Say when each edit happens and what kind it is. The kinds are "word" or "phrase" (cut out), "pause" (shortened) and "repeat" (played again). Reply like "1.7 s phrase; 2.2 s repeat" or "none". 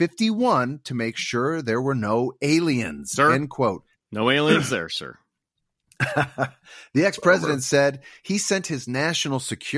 none

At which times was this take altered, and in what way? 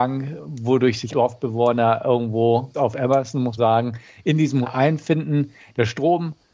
1.1 s word; 2.7 s word; 3.6 s word; 4.6 s word

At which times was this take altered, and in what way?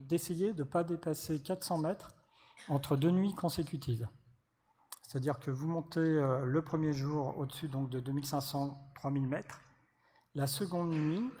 none

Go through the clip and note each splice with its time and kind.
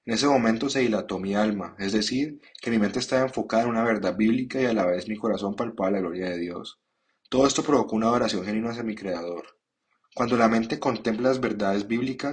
none

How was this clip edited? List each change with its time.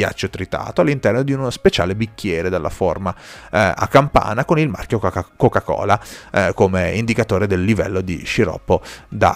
none

